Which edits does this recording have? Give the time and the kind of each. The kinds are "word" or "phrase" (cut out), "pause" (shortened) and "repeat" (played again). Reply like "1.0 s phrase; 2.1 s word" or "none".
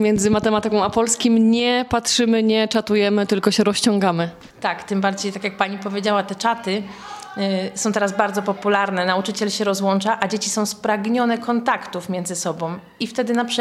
4.5 s pause